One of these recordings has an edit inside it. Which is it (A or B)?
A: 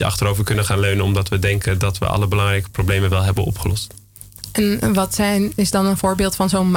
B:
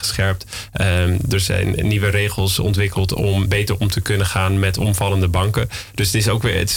B